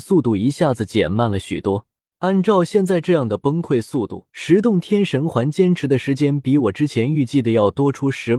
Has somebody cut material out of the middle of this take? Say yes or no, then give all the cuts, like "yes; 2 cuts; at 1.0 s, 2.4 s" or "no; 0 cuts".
yes; 2 cuts; at 2.1 s, 4.3 s